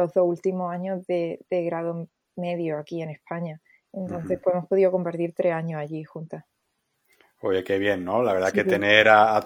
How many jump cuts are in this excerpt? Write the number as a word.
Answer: zero